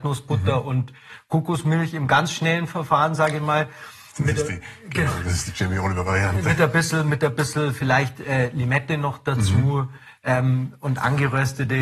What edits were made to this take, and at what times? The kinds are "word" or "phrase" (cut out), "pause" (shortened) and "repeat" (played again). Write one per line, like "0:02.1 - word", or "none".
none